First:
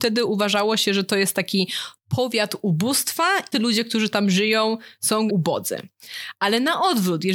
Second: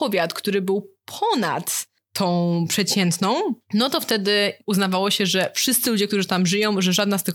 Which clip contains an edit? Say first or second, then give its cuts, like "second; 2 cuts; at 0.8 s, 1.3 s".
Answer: first; 2 cuts; at 3.5 s, 5.3 s